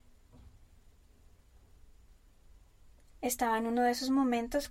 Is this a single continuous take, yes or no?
yes